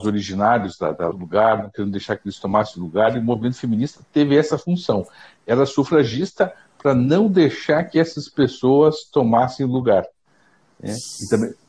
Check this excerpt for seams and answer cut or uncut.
cut